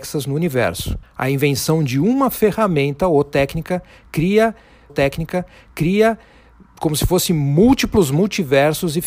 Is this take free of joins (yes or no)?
no